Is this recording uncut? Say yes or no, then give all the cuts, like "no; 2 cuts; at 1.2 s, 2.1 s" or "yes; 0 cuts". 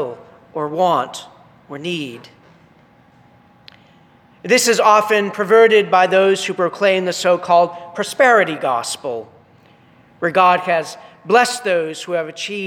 yes; 0 cuts